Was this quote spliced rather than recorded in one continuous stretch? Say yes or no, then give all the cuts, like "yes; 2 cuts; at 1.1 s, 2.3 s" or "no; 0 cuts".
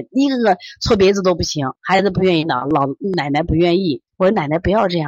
yes; 2 cuts; at 1.8 s, 4.1 s